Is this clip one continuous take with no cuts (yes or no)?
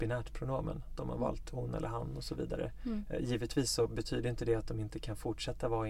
yes